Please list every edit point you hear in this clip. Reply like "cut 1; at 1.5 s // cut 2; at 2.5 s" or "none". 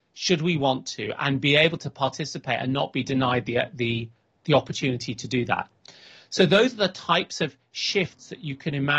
none